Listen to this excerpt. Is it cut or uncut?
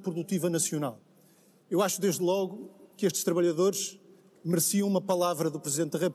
uncut